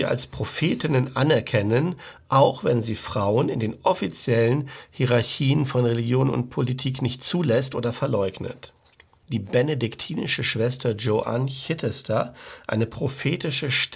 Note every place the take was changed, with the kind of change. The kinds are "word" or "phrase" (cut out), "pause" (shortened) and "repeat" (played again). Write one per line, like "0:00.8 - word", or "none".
none